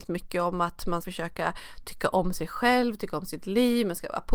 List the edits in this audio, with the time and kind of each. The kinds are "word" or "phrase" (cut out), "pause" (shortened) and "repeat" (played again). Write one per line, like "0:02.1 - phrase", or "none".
0:01.0 - word